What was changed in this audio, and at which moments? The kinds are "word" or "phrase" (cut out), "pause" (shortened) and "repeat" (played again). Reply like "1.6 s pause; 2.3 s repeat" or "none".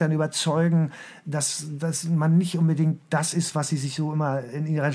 none